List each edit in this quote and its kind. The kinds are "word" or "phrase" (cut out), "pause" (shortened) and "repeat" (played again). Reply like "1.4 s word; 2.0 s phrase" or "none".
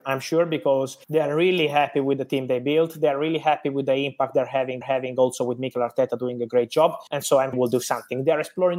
1.0 s pause; 4.8 s repeat; 7.1 s pause; 7.5 s phrase